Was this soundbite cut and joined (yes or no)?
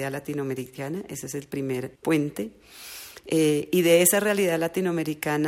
yes